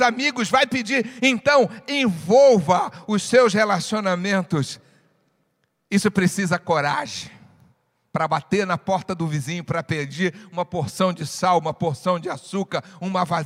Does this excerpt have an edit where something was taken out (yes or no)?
no